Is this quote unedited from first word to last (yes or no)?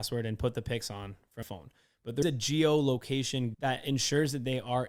no